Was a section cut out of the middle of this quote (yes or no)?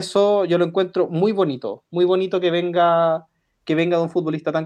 no